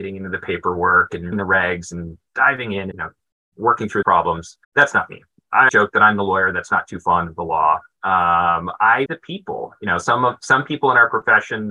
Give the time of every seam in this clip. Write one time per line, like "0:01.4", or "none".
0:01.3
0:02.9
0:04.0
0:04.6
0:05.7
0:09.1